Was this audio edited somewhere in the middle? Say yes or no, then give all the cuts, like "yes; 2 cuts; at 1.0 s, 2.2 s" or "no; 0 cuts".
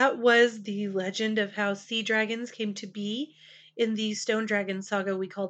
no; 0 cuts